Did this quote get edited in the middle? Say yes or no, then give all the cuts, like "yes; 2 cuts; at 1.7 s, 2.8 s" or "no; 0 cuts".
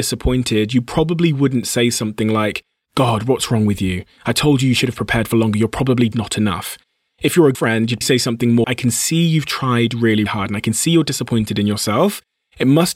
yes; 5 cuts; at 6.1 s, 7.5 s, 8.0 s, 8.6 s, 10.3 s